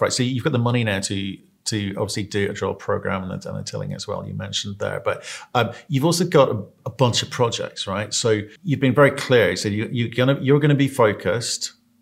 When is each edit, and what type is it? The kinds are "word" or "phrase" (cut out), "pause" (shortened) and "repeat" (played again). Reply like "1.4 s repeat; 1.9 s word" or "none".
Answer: 8.6 s pause